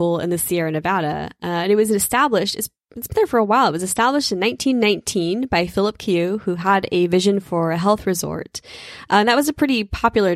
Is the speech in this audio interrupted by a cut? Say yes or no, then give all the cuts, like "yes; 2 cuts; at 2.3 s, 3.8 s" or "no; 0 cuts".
no; 0 cuts